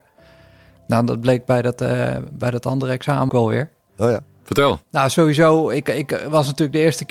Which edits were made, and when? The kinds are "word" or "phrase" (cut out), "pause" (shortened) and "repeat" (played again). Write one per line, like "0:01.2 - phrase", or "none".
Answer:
0:03.3 - word
0:04.8 - pause